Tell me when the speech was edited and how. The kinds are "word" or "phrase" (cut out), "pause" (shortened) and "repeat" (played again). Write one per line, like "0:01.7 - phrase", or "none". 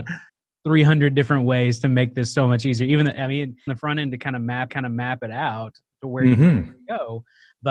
0:03.7 - phrase
0:04.7 - repeat